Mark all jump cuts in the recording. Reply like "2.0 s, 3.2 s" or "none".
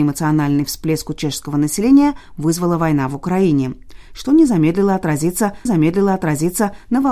5.7 s